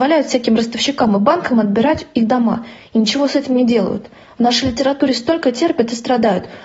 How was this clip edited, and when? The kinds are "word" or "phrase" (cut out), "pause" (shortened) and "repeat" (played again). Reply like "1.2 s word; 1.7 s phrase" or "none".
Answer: none